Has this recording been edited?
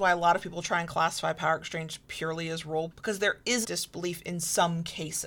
yes; 2 cuts; at 2.9 s, 3.6 s

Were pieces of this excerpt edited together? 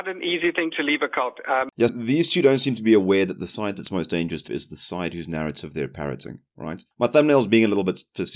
yes; 3 cuts; at 1.9 s, 4.5 s, 6.9 s

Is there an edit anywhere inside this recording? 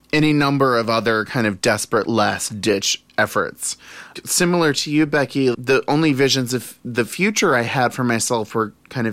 no; 0 cuts

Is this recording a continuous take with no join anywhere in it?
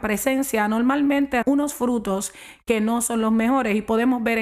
no; 1 cut; at 1.4 s

